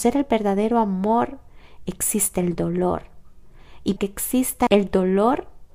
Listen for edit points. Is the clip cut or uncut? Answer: cut